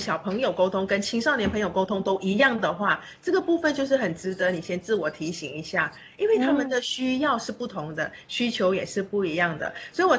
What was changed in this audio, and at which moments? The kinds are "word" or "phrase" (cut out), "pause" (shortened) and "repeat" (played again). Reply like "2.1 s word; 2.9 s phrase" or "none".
none